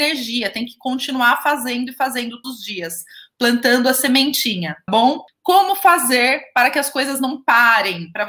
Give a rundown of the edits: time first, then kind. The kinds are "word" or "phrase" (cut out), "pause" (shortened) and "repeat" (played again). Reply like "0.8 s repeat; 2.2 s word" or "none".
2.4 s word; 4.9 s word